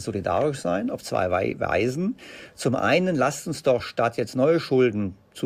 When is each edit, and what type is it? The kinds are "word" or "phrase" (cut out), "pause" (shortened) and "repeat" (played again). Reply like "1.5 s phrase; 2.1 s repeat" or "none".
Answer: none